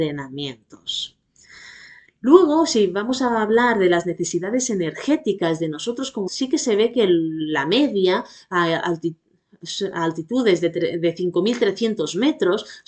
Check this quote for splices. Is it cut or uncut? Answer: cut